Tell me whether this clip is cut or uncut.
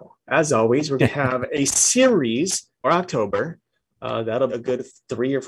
cut